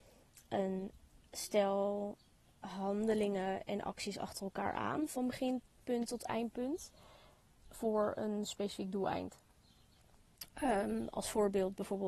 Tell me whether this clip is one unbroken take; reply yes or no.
yes